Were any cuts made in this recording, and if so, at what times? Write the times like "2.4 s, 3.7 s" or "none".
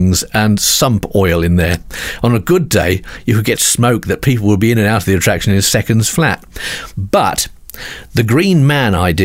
3.6 s